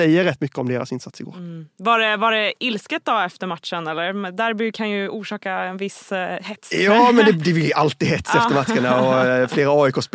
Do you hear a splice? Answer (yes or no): no